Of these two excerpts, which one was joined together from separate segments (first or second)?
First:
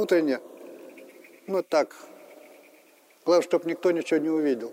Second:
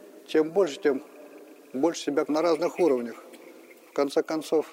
second